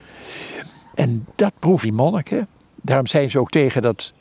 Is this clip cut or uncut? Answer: cut